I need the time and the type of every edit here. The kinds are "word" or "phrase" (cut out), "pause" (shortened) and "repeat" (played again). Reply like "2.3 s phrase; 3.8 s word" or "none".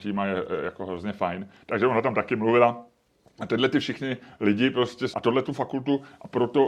5.1 s word; 5.4 s phrase